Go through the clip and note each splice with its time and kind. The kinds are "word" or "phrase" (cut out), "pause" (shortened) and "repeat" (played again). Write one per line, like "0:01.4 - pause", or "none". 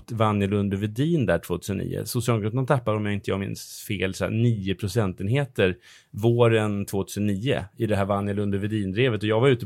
none